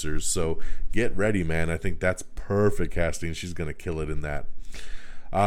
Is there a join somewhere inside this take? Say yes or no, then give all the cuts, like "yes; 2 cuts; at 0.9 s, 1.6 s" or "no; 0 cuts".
no; 0 cuts